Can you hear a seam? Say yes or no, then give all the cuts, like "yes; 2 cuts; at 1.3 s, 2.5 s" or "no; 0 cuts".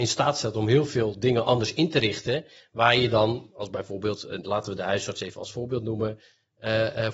no; 0 cuts